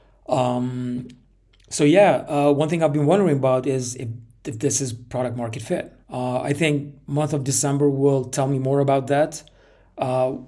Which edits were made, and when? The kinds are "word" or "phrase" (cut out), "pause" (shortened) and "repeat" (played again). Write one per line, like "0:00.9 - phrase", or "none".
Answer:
0:06.0 - pause